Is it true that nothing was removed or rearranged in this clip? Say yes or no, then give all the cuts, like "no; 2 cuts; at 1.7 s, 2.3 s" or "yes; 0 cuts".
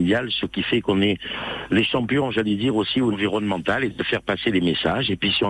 no; 1 cut; at 3.1 s